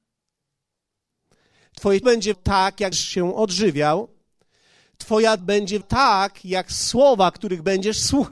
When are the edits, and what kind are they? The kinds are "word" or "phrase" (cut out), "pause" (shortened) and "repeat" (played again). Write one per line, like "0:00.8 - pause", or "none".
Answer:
0:02.0 - word
0:02.3 - word
0:02.9 - word
0:05.4 - word
0:05.8 - word

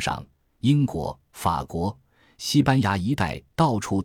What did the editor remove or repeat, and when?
none

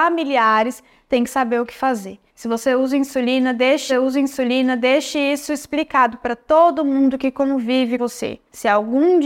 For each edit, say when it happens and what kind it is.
0:02.3 - pause
0:03.9 - repeat
0:08.0 - word

